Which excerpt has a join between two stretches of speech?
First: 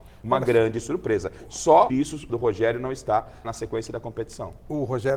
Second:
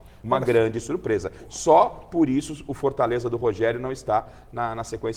first; 3 cuts; at 1.9 s, 2.3 s, 3.4 s

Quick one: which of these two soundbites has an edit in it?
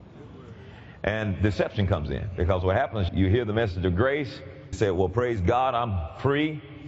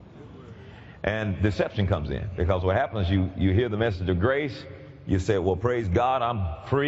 first; 2 cuts; at 3.1 s, 4.7 s

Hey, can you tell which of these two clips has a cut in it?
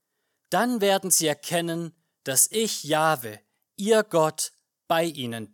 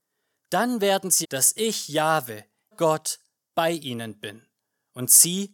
second; 2 cuts; at 1.2 s, 2.7 s

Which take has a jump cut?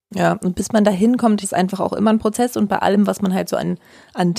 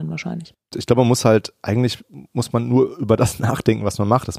first; 1 cut; at 1.4 s

